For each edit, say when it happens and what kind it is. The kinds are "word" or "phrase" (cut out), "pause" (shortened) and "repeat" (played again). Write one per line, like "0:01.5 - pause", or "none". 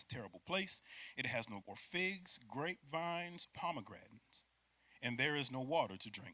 0:01.6 - word
0:03.5 - word